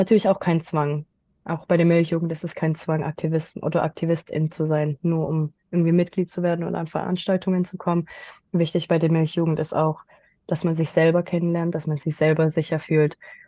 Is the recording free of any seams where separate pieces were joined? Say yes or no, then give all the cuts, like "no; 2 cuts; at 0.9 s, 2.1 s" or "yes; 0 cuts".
yes; 0 cuts